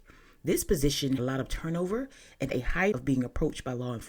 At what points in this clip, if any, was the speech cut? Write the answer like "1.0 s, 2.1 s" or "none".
1.2 s, 2.5 s, 2.9 s